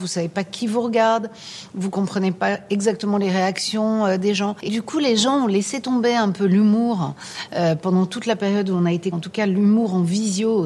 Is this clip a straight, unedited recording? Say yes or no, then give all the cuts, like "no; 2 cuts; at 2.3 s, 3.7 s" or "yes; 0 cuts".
no; 2 cuts; at 4.7 s, 9.1 s